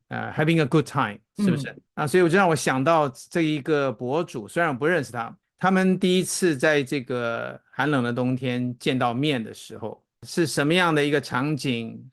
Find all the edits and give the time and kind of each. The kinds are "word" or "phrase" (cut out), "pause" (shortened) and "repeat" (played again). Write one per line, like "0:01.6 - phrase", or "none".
0:01.3 - word
0:01.9 - pause
0:05.4 - pause
0:10.2 - pause